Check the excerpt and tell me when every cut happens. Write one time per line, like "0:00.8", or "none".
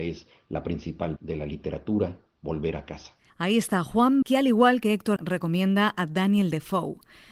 0:01.2
0:03.3
0:04.2
0:05.2